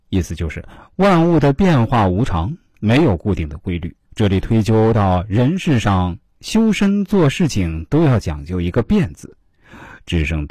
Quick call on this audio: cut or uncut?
cut